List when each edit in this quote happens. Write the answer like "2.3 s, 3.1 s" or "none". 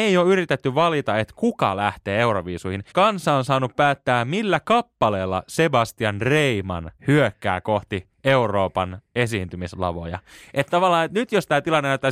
2.9 s, 7.0 s